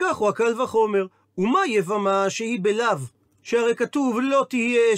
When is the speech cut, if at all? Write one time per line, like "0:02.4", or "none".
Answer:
none